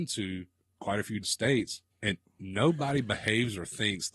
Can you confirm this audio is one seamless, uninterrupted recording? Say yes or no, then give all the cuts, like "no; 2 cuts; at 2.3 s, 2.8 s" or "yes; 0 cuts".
no; 2 cuts; at 1.2 s, 1.9 s